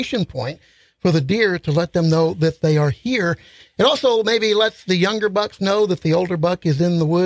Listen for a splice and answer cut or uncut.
uncut